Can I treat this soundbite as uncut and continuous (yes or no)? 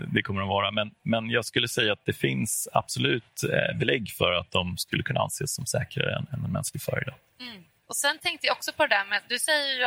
yes